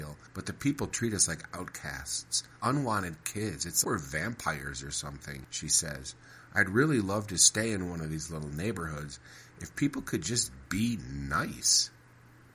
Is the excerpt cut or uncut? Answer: cut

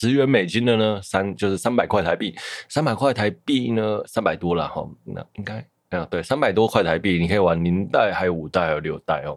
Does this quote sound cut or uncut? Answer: uncut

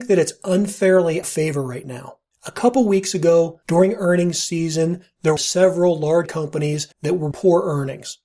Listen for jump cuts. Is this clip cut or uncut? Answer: cut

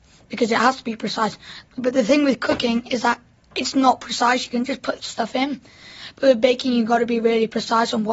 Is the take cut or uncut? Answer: uncut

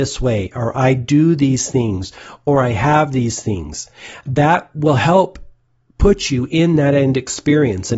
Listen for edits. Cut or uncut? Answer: uncut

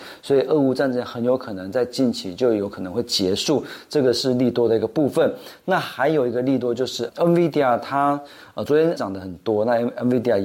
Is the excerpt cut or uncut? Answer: cut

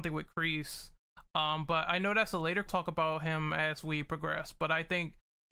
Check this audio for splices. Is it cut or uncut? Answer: cut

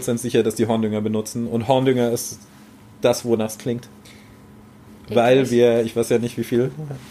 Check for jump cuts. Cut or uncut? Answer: uncut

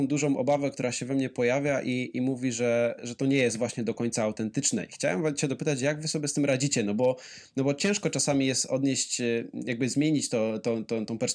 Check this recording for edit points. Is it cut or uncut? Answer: uncut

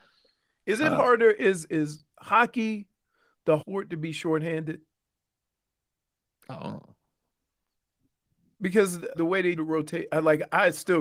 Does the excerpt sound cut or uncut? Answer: cut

